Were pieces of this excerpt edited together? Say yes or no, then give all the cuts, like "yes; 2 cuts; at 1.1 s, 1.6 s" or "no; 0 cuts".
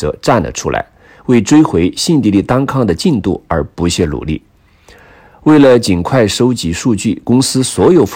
no; 0 cuts